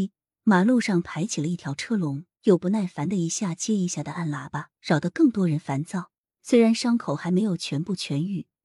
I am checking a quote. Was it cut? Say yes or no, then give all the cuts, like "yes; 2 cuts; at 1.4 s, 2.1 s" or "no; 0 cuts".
yes; 3 cuts; at 2.3 s, 4.7 s, 6.2 s